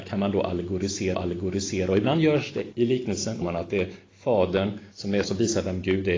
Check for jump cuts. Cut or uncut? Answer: cut